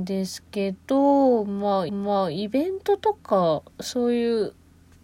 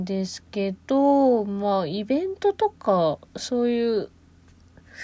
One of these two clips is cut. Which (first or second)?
first